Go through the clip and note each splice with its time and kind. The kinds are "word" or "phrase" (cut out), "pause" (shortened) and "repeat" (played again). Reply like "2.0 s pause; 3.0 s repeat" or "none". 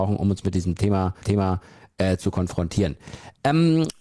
1.2 s repeat